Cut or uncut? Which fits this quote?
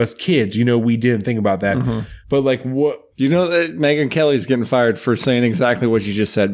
cut